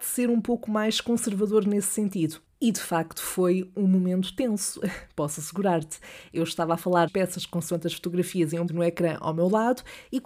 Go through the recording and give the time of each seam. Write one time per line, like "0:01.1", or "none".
0:07.1
0:08.7